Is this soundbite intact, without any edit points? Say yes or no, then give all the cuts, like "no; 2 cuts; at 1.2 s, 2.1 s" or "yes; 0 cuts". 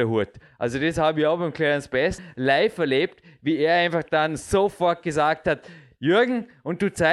yes; 0 cuts